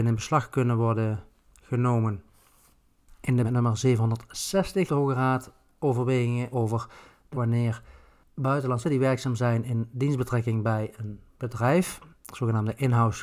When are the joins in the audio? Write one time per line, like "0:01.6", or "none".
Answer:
0:03.4
0:04.9
0:06.5
0:07.3
0:08.8